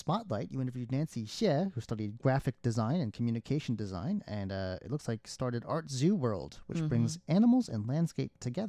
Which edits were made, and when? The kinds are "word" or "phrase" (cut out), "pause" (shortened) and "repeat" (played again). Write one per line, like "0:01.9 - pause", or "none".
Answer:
none

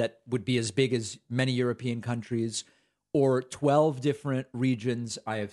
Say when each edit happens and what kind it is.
none

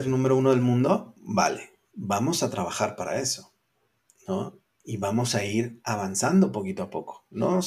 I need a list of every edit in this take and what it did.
none

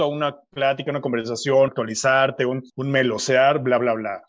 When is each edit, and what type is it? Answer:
0:01.7 - word
0:02.7 - pause

